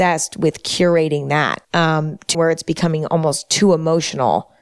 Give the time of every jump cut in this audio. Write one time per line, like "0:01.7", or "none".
0:01.6
0:02.3